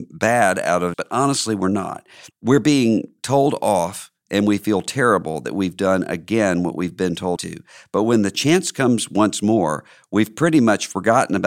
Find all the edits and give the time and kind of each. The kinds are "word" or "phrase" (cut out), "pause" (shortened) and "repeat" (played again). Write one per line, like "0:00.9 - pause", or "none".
0:00.9 - word
0:07.4 - word